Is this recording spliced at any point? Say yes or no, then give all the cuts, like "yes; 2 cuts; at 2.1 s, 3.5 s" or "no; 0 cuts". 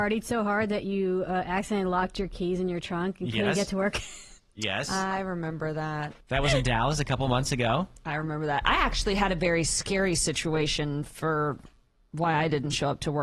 yes; 3 cuts; at 4.4 s, 6.2 s, 11.9 s